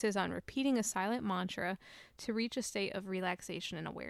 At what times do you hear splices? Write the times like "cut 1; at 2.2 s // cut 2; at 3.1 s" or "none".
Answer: none